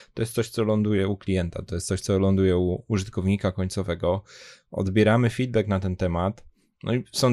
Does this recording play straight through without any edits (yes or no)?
yes